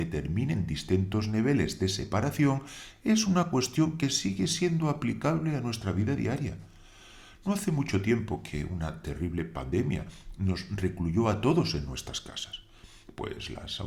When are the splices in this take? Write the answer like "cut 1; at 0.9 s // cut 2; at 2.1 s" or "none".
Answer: none